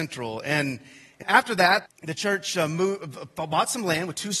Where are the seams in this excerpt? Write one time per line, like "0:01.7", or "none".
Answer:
0:01.2
0:01.9